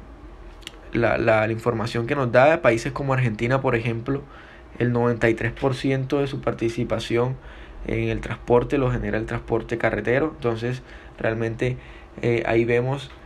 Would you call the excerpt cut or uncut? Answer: uncut